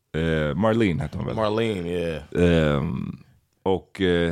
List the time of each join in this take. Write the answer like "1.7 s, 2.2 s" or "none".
none

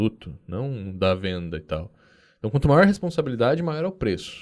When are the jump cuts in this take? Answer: none

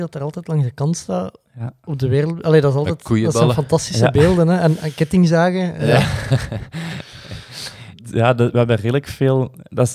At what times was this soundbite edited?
none

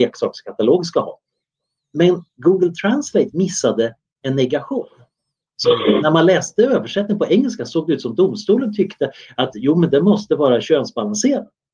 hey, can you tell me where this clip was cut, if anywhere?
none

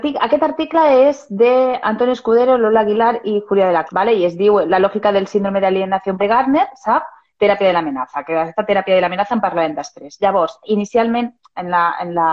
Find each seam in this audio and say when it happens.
3.9 s, 6.2 s, 8.6 s

